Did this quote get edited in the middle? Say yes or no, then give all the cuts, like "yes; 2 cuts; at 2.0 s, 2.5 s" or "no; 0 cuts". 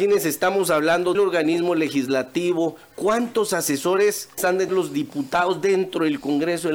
yes; 3 cuts; at 1.1 s, 4.4 s, 4.7 s